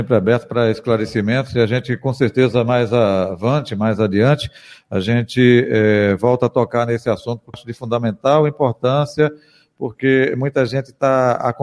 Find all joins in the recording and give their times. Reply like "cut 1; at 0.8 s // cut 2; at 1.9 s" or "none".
cut 1; at 7.5 s